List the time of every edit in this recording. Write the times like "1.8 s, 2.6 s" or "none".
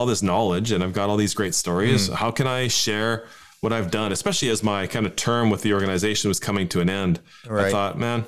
none